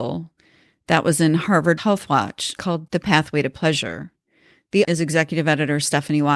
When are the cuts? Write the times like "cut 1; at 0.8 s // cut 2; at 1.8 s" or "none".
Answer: cut 1; at 1.8 s // cut 2; at 2.6 s // cut 3; at 2.9 s // cut 4; at 4.8 s